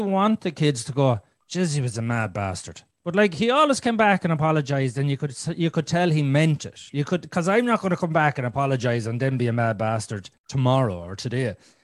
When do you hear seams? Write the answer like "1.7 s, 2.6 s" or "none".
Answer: 10.4 s